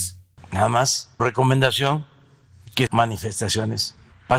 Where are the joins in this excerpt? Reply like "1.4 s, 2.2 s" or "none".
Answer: 1.2 s, 2.9 s